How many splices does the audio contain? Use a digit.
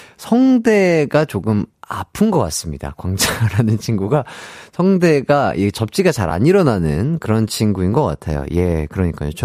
0